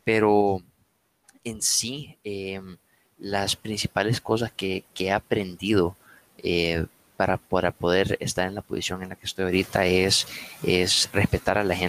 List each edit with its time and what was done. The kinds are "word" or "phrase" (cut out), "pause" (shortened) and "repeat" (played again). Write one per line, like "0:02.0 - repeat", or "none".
none